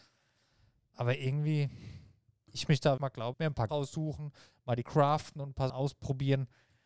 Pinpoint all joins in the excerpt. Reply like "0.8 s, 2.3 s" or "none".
2.7 s, 3.0 s, 3.3 s, 3.7 s, 4.8 s, 5.7 s